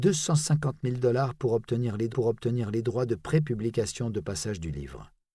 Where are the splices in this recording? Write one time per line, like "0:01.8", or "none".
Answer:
0:02.1